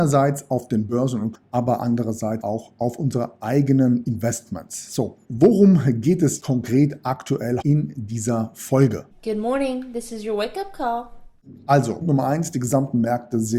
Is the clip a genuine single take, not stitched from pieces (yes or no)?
no